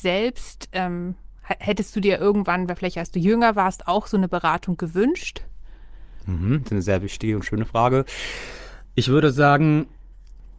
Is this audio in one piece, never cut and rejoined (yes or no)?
yes